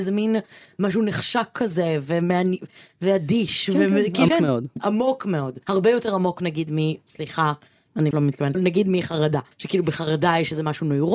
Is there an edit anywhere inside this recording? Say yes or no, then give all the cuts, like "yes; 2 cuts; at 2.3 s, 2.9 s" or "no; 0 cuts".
yes; 5 cuts; at 4.3 s, 5.6 s, 8.1 s, 8.5 s, 9.5 s